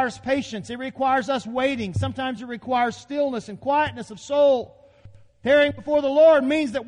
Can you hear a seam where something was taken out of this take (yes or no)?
no